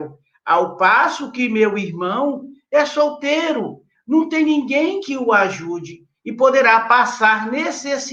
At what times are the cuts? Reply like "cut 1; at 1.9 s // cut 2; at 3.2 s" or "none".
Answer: none